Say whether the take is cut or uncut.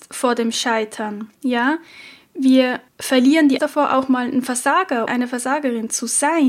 cut